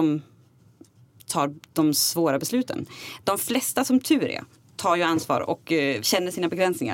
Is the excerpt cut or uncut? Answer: cut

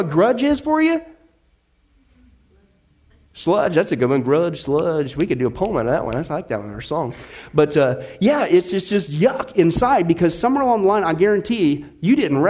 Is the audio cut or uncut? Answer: uncut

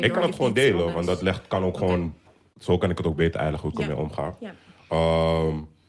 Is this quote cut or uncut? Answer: uncut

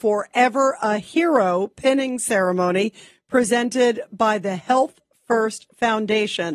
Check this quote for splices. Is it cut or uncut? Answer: uncut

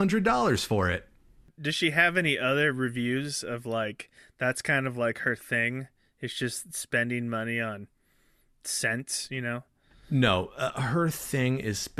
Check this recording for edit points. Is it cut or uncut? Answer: uncut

